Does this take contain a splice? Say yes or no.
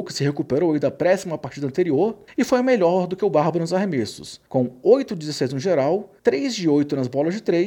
yes